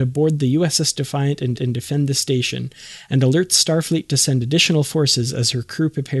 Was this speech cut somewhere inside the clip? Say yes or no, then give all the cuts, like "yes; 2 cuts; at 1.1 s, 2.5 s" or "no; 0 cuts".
yes; 1 cut; at 1.5 s